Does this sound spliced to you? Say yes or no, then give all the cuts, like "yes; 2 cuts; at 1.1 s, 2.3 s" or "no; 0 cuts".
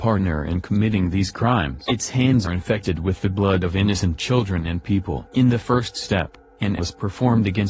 yes; 2 cuts; at 2.4 s, 6.8 s